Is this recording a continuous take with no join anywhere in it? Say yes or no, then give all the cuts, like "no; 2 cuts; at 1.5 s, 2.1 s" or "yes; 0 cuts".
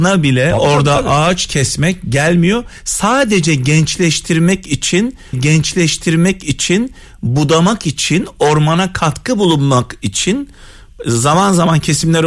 no; 1 cut; at 5.3 s